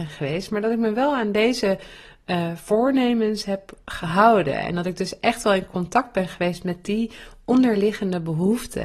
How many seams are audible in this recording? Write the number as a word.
zero